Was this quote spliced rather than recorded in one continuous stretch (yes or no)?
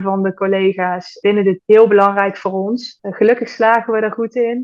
yes